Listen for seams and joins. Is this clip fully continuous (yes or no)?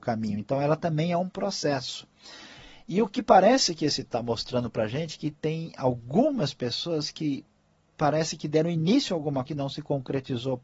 no